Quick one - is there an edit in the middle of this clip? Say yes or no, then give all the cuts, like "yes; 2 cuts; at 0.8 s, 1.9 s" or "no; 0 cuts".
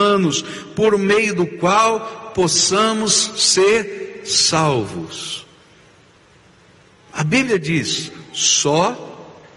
no; 0 cuts